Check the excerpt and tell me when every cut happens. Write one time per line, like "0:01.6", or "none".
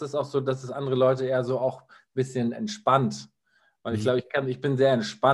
none